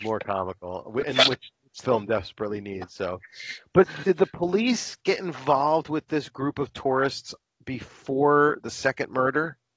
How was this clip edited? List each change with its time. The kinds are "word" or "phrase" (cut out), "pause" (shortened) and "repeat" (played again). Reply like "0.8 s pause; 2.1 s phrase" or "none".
1.8 s word